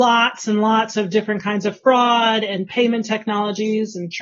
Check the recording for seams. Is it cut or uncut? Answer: uncut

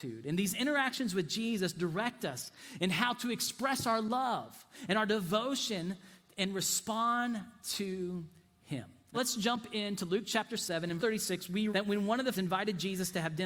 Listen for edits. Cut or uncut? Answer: cut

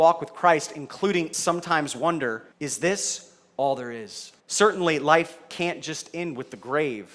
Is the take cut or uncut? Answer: cut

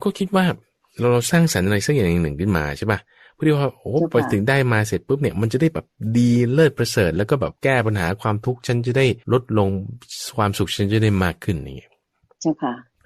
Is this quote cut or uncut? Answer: cut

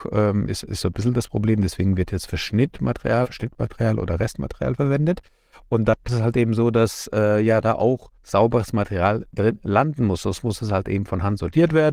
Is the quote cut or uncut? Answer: cut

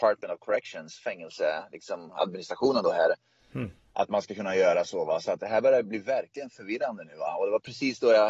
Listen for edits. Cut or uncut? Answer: uncut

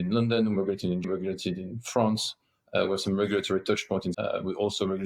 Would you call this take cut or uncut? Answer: cut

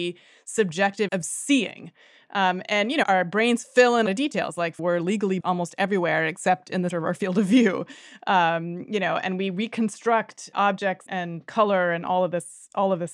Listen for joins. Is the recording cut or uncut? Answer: cut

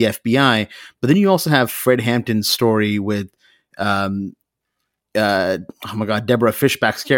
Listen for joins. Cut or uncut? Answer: uncut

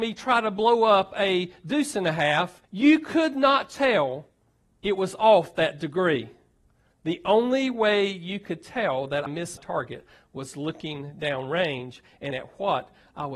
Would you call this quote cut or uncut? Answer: cut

